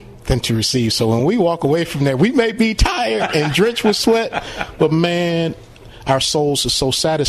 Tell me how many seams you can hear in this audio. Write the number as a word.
zero